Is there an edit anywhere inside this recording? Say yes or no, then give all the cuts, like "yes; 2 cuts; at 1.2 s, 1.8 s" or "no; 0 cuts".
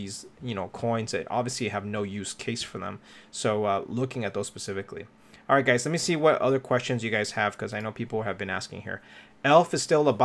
no; 0 cuts